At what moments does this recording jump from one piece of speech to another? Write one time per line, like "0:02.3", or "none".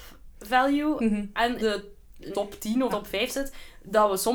0:01.6
0:02.3
0:02.9